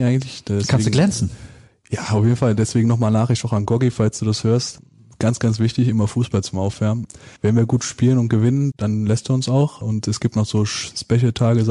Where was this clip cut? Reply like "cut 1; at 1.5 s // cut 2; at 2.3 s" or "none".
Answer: cut 1; at 7.4 s // cut 2; at 8.7 s

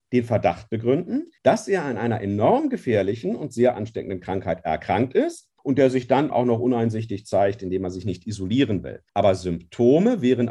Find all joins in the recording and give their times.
cut 1; at 1.4 s // cut 2; at 5.6 s // cut 3; at 6.3 s // cut 4; at 9.1 s

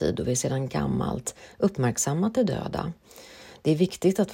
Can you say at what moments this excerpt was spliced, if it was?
none

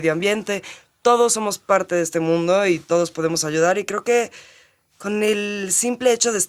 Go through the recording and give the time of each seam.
none

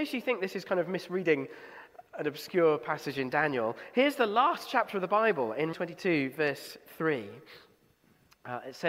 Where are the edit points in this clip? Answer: cut 1; at 2.1 s // cut 2; at 5.7 s

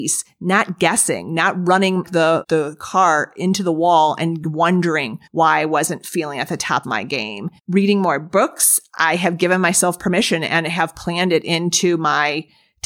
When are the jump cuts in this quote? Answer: cut 1; at 2.0 s // cut 2; at 2.4 s // cut 3; at 5.3 s // cut 4; at 6.8 s // cut 5; at 7.6 s

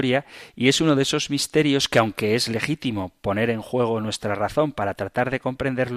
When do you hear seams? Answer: none

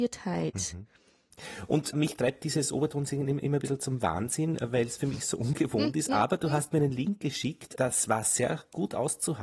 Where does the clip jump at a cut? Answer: none

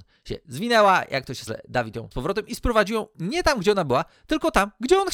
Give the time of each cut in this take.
cut 1; at 1.5 s // cut 2; at 2.1 s

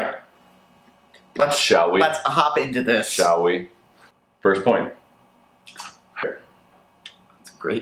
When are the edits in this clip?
cut 1; at 4.1 s // cut 2; at 6.2 s

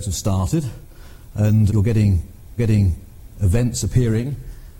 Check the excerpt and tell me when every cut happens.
cut 1; at 1.7 s // cut 2; at 2.6 s

